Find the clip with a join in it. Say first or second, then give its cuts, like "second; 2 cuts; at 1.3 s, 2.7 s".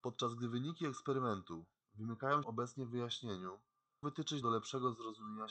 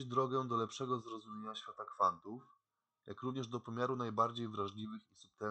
first; 3 cuts; at 2.4 s, 4.0 s, 4.4 s